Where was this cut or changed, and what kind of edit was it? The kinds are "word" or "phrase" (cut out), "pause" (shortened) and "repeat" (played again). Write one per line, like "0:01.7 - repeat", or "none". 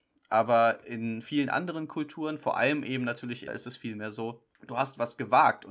0:03.5 - word